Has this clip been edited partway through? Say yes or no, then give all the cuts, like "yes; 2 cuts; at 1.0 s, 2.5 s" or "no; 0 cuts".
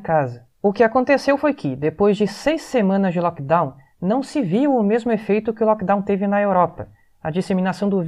no; 0 cuts